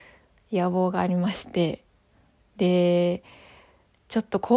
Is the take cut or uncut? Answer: uncut